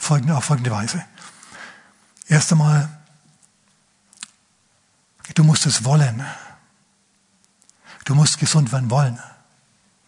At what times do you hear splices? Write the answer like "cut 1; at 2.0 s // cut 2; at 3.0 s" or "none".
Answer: none